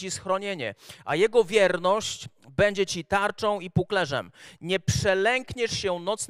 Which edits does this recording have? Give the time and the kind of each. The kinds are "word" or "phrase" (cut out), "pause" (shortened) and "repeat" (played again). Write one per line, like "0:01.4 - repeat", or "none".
none